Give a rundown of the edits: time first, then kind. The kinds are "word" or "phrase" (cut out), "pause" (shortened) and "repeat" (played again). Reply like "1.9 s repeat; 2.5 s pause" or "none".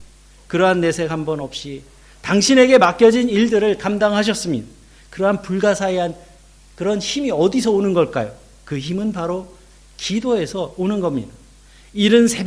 none